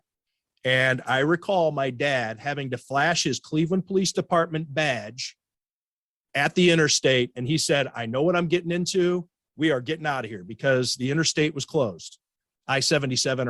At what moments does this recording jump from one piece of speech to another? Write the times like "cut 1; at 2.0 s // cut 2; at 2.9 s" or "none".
none